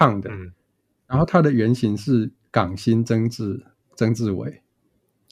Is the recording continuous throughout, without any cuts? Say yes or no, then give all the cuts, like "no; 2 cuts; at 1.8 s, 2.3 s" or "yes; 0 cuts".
yes; 0 cuts